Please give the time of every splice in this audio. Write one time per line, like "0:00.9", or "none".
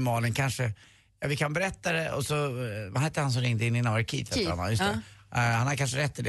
none